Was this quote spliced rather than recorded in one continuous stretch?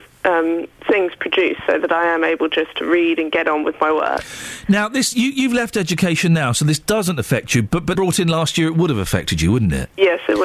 yes; 1 cut; at 7.9 s

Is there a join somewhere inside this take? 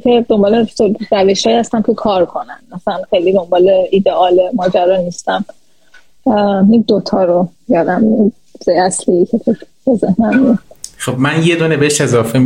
no; 0 cuts

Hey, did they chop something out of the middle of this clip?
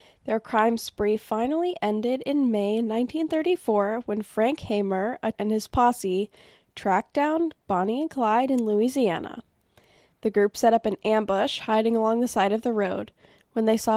yes; 1 cut; at 5.3 s

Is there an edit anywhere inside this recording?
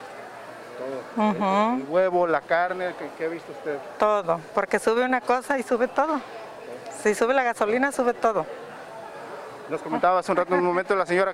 no; 0 cuts

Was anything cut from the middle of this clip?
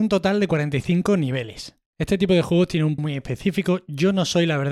yes; 2 cuts; at 1.9 s, 3.0 s

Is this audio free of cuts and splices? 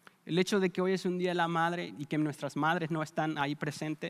yes; 0 cuts

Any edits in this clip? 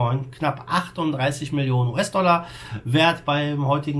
no; 0 cuts

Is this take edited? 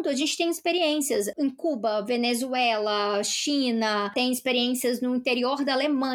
no; 0 cuts

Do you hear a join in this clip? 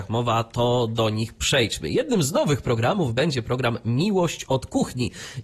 no; 0 cuts

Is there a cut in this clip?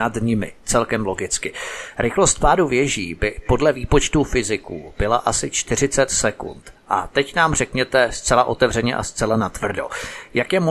no; 0 cuts

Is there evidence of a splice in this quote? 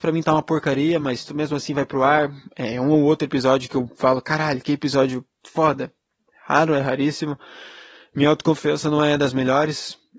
no; 0 cuts

